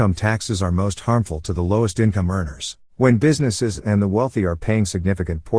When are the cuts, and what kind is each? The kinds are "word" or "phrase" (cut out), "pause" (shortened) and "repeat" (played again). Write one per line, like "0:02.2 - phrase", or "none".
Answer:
0:02.9 - pause